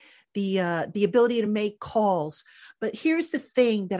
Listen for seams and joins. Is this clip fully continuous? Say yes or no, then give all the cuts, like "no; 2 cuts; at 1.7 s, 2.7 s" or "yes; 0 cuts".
yes; 0 cuts